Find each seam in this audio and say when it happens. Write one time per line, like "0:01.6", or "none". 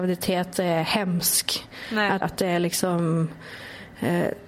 0:02.2

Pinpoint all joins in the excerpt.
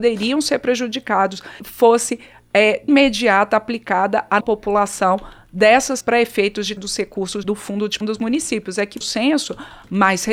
0:01.6
0:02.9
0:04.4
0:06.0
0:06.8
0:07.4
0:08.0
0:09.0

